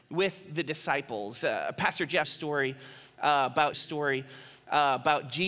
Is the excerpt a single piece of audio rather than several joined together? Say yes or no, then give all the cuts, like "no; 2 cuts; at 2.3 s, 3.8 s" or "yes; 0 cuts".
no; 2 cuts; at 2.2 s, 3.7 s